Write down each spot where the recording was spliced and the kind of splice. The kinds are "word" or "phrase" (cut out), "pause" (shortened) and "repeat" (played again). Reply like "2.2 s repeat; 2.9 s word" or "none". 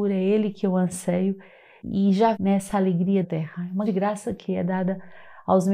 1.8 s word; 2.3 s word; 3.2 s word; 3.9 s word